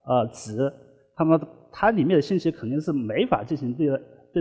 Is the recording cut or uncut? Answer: uncut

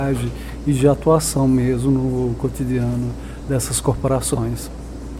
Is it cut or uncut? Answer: uncut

